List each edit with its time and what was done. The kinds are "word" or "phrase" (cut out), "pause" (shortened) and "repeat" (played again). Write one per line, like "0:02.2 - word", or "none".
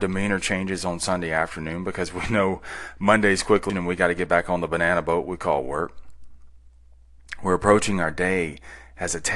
0:03.7 - word